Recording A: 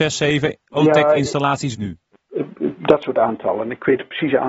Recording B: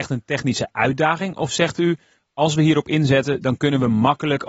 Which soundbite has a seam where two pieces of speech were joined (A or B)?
A